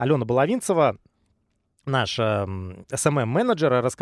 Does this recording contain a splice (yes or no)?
no